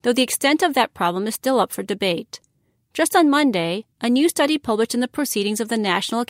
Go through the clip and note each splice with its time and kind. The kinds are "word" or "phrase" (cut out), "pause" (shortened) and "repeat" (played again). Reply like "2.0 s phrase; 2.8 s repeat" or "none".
none